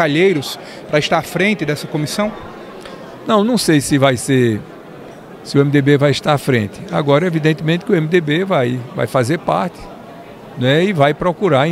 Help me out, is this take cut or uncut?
uncut